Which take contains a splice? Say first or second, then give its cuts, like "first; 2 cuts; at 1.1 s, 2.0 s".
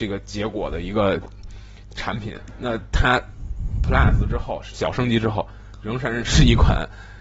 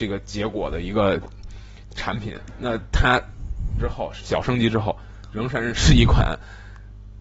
second; 1 cut; at 3.8 s